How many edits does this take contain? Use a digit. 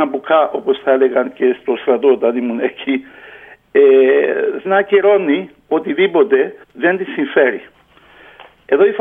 2